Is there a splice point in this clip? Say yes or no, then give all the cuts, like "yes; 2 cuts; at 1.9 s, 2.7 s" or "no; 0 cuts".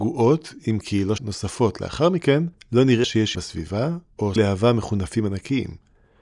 yes; 5 cuts; at 1.2 s, 2.5 s, 3.0 s, 3.3 s, 4.4 s